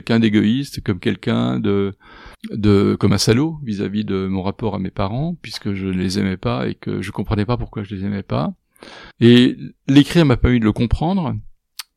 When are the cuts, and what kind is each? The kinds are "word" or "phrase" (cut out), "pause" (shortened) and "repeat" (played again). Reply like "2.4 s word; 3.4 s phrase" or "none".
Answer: 2.3 s pause; 9.1 s pause